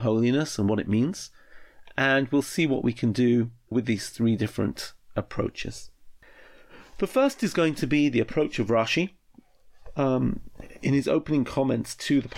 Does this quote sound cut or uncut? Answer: cut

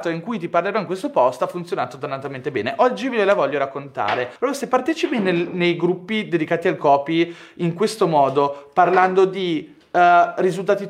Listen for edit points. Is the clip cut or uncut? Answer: cut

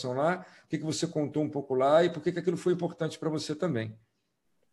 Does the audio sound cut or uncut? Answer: uncut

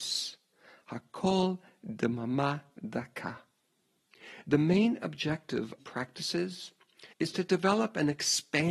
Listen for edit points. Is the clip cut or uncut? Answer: cut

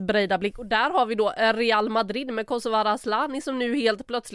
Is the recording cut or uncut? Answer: uncut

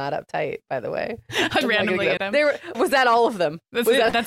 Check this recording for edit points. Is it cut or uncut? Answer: cut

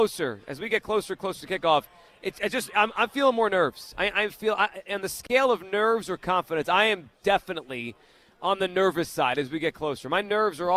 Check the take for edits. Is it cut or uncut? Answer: uncut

